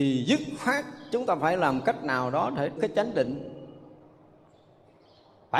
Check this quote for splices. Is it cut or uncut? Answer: cut